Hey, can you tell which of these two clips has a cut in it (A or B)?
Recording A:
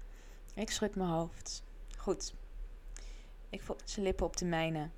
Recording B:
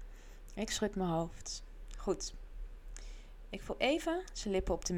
A